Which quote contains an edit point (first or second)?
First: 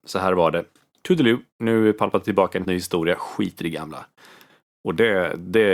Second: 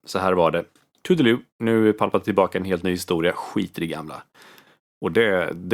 first